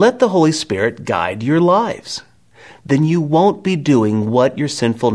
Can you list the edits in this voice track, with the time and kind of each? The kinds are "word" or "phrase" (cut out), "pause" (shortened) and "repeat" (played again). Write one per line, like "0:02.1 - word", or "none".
none